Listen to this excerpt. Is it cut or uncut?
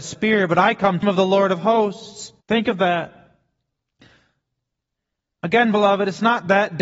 cut